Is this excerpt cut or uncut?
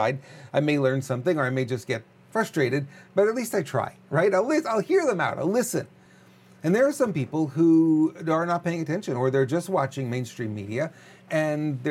uncut